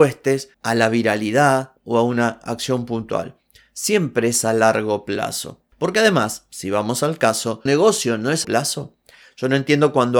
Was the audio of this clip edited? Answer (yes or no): yes